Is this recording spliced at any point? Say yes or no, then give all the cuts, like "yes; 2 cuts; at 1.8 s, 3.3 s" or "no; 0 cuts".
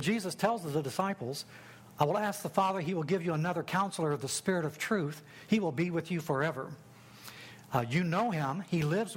no; 0 cuts